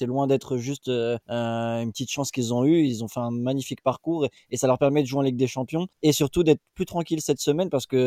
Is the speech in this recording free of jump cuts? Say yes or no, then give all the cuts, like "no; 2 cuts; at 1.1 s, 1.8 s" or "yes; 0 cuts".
no; 2 cuts; at 1.2 s, 5.9 s